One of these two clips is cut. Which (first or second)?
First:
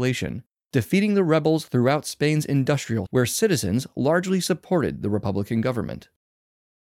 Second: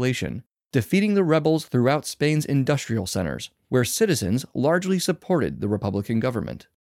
first